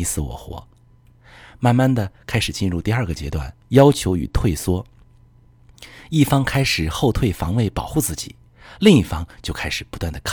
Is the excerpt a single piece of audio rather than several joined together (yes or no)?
no